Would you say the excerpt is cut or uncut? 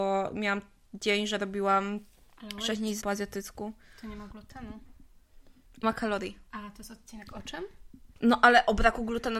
cut